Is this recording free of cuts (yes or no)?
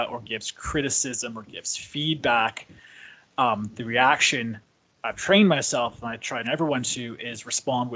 no